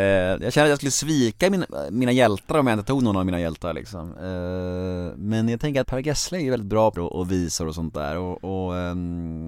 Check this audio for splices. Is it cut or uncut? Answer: cut